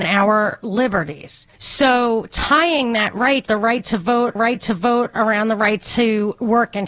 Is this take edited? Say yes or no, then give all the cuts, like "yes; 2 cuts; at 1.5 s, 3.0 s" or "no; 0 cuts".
yes; 3 cuts; at 1.5 s, 3.5 s, 4.4 s